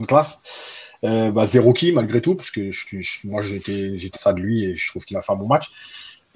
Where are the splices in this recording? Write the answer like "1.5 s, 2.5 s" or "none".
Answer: 4.1 s